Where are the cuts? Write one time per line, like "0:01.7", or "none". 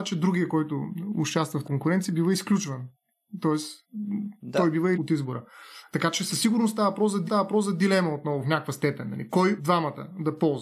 0:01.6
0:04.9
0:07.3
0:09.6